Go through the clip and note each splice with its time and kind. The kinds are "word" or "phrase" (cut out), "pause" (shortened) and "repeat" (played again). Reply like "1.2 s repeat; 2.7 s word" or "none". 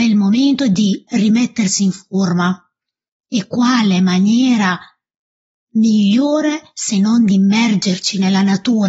none